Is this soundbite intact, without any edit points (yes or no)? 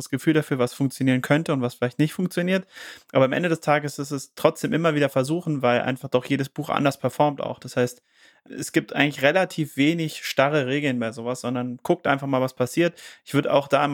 yes